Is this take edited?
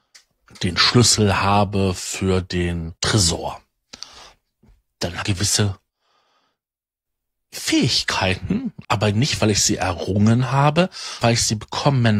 yes; 4 cuts; at 3.0 s, 5.2 s, 8.8 s, 11.2 s

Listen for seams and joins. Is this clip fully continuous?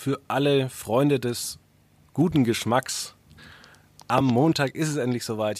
yes; 0 cuts

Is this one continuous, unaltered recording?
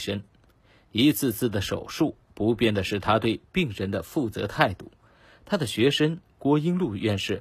yes; 0 cuts

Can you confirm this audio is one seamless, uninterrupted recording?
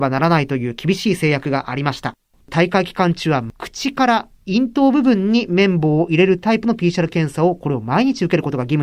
yes; 0 cuts

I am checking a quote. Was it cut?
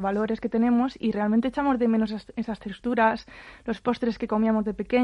no; 0 cuts

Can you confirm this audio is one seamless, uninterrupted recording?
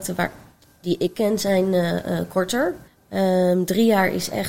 no; 1 cut; at 2.9 s

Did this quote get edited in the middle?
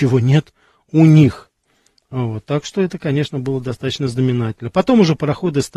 no; 0 cuts

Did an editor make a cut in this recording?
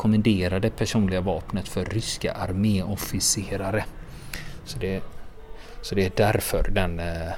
no; 0 cuts

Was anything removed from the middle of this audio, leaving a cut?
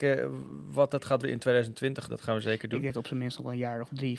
yes; 3 cuts; at 1.2 s, 2.1 s, 2.9 s

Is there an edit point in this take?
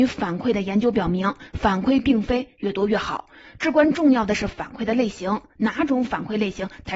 no; 0 cuts

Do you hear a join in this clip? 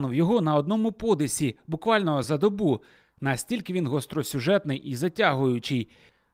no; 0 cuts

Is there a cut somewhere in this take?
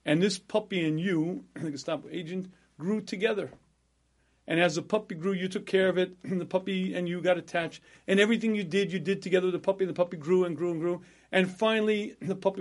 no; 0 cuts

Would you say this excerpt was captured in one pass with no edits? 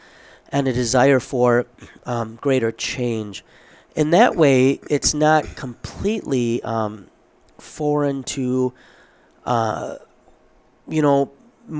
yes; 0 cuts

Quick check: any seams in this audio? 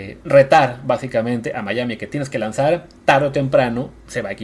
yes; 1 cut; at 3.0 s

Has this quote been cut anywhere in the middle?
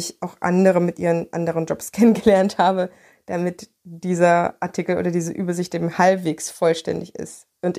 no; 0 cuts

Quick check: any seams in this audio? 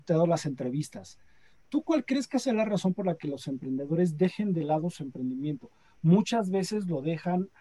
no; 0 cuts

